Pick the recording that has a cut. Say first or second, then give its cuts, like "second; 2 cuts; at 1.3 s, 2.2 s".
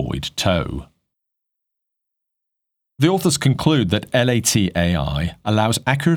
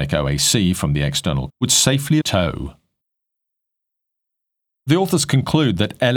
second; 2 cuts; at 1.5 s, 2.2 s